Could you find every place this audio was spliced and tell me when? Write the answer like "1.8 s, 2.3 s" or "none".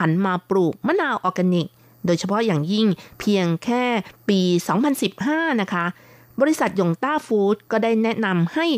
none

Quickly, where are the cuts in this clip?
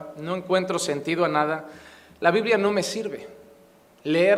none

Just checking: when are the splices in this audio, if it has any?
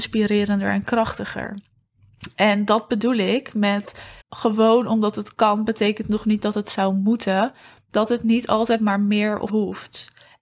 4.2 s, 9.5 s

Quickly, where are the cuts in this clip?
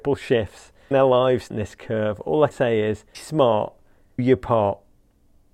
0.9 s, 1.5 s, 2.5 s, 3.1 s, 4.2 s

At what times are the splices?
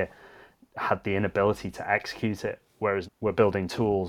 3.0 s

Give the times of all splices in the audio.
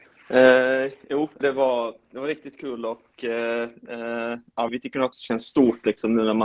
1.4 s, 4.7 s, 5.1 s

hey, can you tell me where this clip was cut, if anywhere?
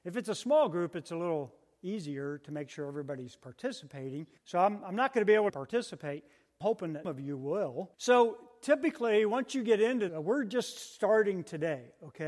4.4 s, 5.5 s, 6.6 s, 7.0 s, 7.9 s, 10.1 s

